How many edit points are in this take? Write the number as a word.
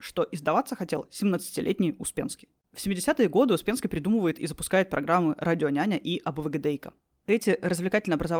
zero